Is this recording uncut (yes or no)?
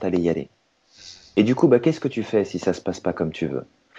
yes